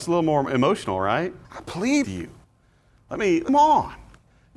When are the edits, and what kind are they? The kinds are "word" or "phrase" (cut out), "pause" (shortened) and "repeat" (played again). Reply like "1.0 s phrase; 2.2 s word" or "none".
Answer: 1.4 s pause; 2.0 s word; 3.5 s phrase